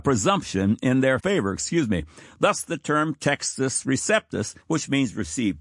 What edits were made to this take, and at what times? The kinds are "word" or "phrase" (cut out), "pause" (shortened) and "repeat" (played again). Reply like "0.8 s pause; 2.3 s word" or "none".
1.2 s word; 4.6 s pause